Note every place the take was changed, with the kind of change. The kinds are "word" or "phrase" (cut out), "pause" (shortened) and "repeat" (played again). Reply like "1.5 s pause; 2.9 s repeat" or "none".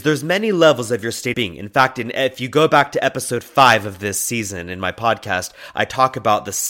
1.3 s word